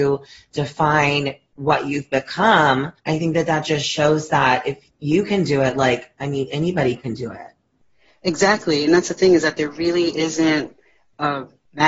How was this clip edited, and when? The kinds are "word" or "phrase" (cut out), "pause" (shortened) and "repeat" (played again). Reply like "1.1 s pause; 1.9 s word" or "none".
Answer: 3.0 s pause